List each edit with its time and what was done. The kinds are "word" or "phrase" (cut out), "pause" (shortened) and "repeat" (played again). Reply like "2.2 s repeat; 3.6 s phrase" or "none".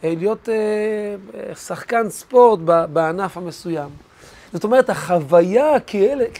none